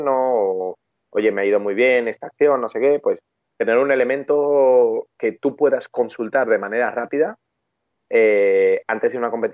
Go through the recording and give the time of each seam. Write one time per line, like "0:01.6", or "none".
none